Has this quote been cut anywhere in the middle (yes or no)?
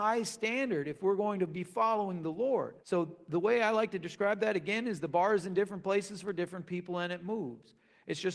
yes